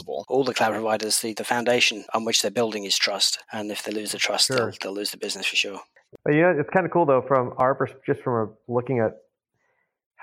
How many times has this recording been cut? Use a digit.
1